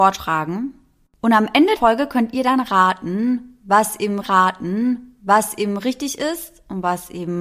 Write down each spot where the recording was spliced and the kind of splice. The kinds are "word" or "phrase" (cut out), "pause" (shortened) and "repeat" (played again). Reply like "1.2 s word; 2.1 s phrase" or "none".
1.7 s word; 4.2 s repeat

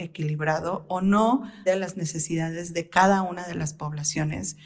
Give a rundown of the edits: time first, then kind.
1.7 s word

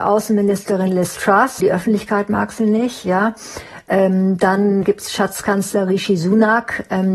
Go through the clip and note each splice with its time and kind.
1.6 s word; 4.8 s word

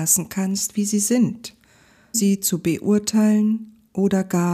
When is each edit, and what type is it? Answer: 2.1 s word

